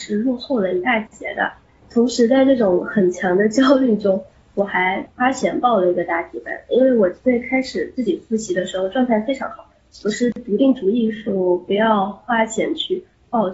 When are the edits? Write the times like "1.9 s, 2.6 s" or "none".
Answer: none